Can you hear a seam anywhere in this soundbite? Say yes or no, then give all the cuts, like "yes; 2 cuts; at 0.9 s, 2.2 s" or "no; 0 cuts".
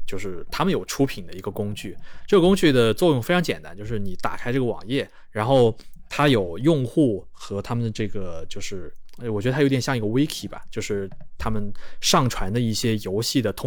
no; 0 cuts